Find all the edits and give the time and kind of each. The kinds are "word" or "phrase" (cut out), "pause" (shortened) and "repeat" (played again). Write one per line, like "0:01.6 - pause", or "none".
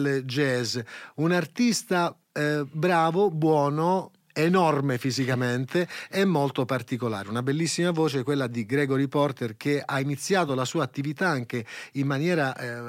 none